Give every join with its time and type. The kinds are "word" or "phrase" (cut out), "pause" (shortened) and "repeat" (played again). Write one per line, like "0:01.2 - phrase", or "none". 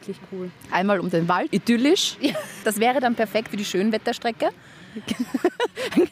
0:01.5 - word
0:03.5 - word